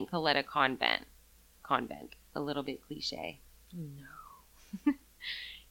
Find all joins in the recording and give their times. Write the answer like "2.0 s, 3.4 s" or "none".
none